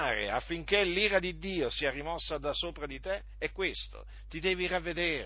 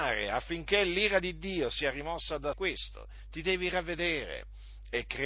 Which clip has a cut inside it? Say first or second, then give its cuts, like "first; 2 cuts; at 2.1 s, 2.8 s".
second; 1 cut; at 2.5 s